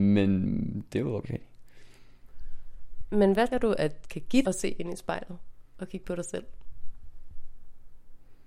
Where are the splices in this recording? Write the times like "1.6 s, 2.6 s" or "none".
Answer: 1.2 s, 3.5 s, 4.0 s, 4.4 s